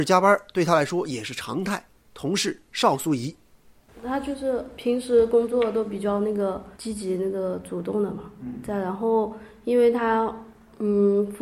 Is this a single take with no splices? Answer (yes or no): no